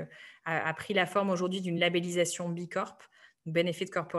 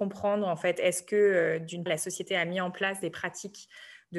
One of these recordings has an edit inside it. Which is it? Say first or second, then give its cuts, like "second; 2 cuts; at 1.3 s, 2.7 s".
second; 1 cut; at 1.9 s